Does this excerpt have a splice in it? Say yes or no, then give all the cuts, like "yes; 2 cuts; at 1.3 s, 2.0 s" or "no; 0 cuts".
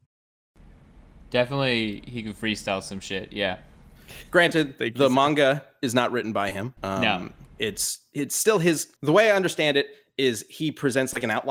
yes; 3 cuts; at 6.8 s, 7.5 s, 9.0 s